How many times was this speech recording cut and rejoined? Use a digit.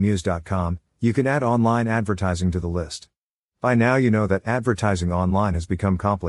0